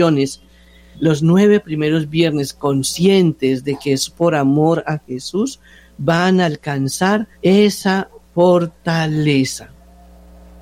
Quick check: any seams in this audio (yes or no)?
yes